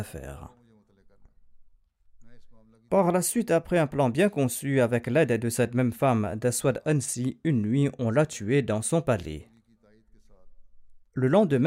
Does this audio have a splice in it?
no; 0 cuts

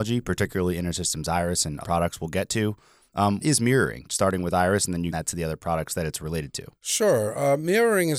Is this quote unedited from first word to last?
no; 4 cuts; at 1.8 s, 3.4 s, 5.1 s, 6.8 s

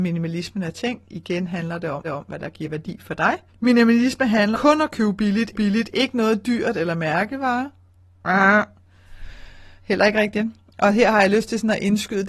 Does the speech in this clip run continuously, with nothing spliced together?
no; 5 cuts; at 2.0 s, 3.5 s, 4.5 s, 5.5 s, 9.8 s

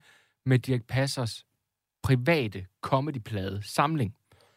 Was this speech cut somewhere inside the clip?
no; 0 cuts

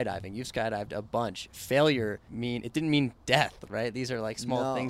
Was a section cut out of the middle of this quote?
yes; 1 cut; at 2.3 s

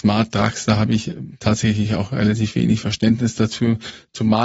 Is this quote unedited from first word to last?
yes; 0 cuts

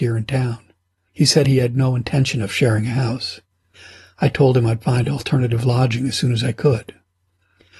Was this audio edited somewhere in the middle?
no; 0 cuts

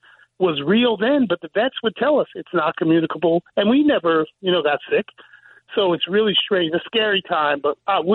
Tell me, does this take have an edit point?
no; 0 cuts

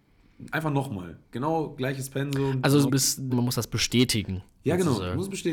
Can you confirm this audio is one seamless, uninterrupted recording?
no; 3 cuts; at 1.2 s, 2.9 s, 3.3 s

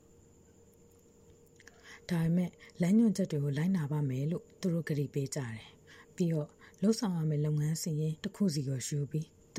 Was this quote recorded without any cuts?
no; 2 cuts; at 5.8 s, 8.2 s

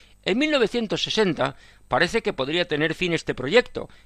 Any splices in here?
no; 0 cuts

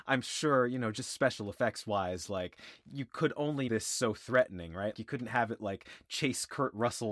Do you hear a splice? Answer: yes; 2 cuts; at 3.7 s, 4.9 s

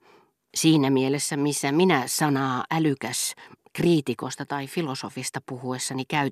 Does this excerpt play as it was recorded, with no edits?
yes; 0 cuts

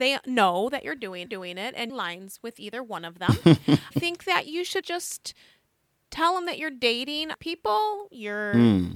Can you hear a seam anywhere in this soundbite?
yes; 5 cuts; at 1.3 s, 1.9 s, 3.9 s, 4.8 s, 7.3 s

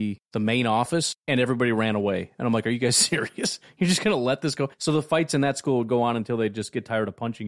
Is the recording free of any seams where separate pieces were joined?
no; 2 cuts; at 1.2 s, 4.7 s

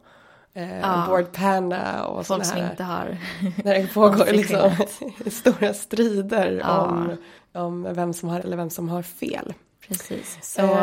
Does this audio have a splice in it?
yes; 1 cut; at 8.4 s

